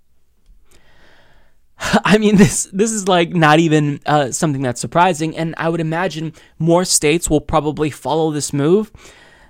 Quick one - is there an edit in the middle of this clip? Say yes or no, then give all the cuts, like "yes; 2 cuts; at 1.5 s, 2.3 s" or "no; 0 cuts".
no; 0 cuts